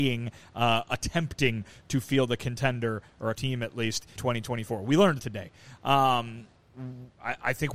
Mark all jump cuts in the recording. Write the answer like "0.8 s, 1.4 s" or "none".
3.3 s, 4.2 s, 5.2 s